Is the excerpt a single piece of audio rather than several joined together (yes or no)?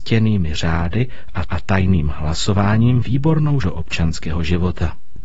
no